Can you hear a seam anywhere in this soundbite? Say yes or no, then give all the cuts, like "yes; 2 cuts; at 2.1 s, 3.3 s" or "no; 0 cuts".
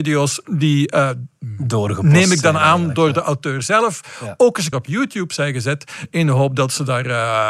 yes; 1 cut; at 4.7 s